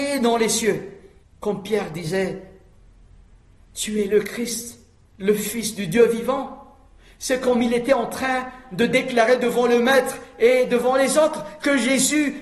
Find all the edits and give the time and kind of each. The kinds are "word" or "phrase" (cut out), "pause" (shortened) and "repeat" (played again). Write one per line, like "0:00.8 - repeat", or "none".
0:01.2 - pause